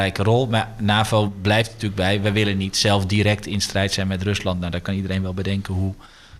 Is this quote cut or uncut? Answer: uncut